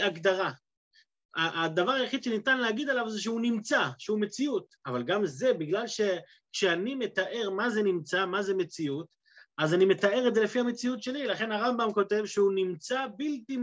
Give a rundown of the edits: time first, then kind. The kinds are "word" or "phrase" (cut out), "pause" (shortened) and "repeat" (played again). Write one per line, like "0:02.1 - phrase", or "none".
none